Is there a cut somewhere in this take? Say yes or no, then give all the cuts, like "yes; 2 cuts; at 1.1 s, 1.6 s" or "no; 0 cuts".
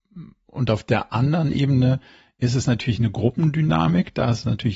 no; 0 cuts